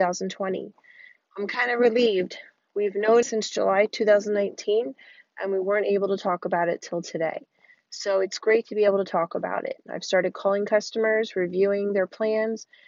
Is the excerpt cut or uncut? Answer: cut